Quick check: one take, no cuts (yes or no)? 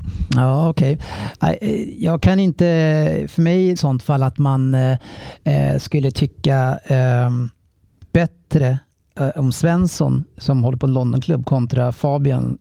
no